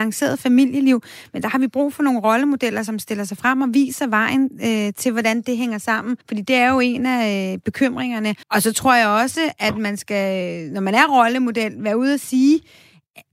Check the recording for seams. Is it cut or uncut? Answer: cut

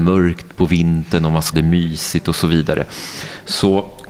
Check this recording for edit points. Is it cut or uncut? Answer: cut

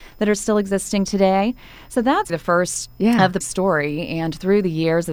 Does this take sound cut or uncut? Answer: cut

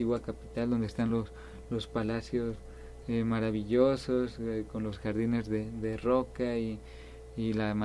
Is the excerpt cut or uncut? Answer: uncut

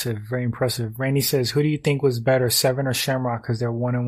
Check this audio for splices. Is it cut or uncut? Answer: uncut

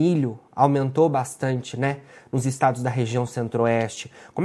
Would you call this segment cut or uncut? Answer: uncut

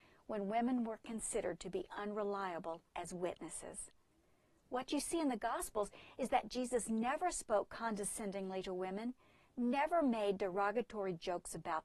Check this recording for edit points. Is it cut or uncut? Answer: cut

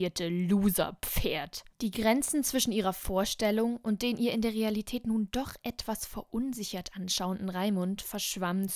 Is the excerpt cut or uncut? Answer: cut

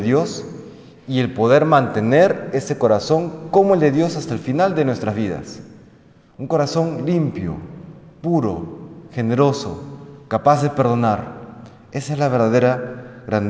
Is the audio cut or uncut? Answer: uncut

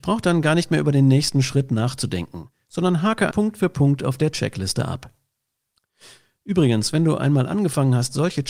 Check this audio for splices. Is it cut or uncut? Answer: cut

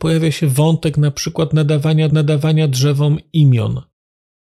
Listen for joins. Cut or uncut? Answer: cut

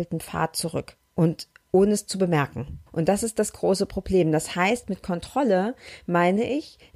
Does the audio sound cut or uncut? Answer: cut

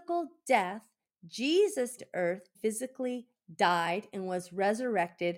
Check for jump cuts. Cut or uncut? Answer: cut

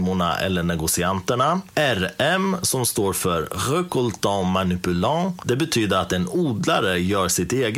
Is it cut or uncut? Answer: uncut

